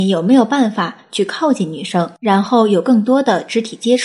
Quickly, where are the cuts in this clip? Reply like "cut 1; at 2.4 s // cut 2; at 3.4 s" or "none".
cut 1; at 2.2 s